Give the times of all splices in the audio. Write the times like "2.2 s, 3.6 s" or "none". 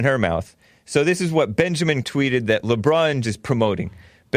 2.0 s, 3.2 s